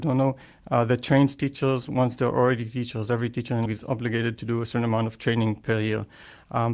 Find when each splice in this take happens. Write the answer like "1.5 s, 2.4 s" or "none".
3.7 s